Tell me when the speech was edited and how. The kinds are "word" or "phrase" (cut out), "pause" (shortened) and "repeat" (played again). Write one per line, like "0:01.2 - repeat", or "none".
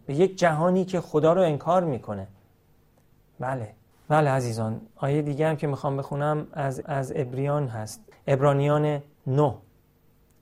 0:03.9 - pause
0:06.8 - repeat
0:08.1 - pause